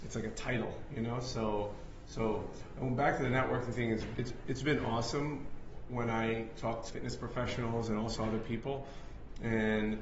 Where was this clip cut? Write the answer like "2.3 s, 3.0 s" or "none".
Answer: 6.9 s